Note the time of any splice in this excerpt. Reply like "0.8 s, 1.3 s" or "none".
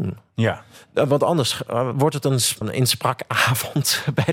2.6 s